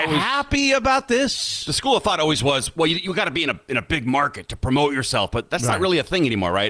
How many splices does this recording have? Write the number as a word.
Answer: zero